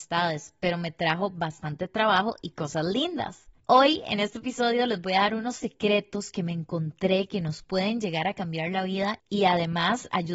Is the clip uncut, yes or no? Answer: yes